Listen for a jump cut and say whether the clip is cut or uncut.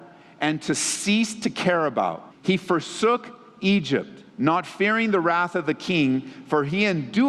cut